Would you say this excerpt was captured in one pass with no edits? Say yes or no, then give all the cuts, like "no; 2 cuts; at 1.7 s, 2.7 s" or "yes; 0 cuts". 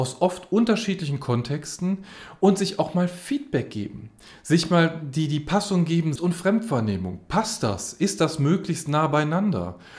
no; 1 cut; at 6.2 s